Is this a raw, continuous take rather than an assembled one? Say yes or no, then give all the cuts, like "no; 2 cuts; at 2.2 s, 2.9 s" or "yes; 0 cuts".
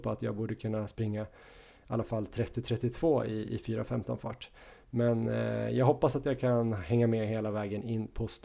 yes; 0 cuts